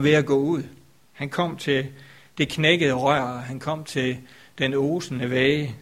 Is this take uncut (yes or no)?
yes